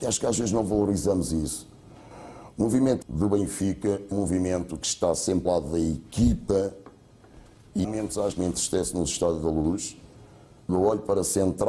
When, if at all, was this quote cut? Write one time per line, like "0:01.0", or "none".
0:03.0
0:04.1
0:05.5
0:07.8
0:08.3
0:10.7